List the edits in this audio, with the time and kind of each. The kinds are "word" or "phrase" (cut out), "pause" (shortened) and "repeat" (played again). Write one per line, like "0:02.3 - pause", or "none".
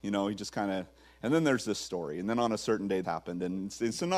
0:03.0 - word